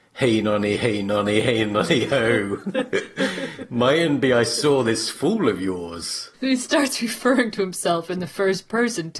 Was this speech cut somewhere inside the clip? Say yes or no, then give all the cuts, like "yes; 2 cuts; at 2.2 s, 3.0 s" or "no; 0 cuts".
yes; 1 cut; at 6.3 s